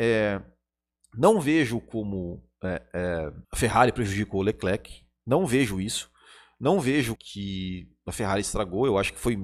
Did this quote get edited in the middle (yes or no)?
yes